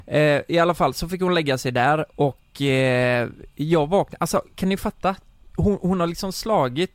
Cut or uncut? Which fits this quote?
uncut